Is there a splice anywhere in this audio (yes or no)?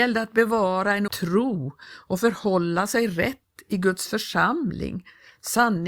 yes